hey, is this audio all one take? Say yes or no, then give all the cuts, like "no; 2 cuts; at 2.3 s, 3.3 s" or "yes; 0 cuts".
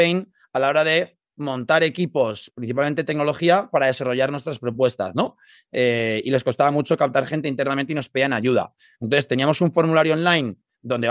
yes; 0 cuts